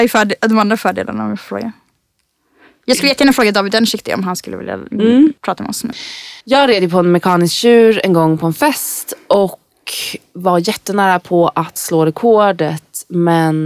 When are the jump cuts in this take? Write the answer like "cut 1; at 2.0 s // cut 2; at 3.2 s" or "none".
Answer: cut 1; at 5.4 s // cut 2; at 6.4 s